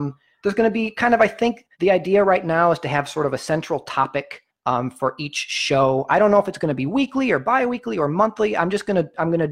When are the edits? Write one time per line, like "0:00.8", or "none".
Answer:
0:01.7
0:04.5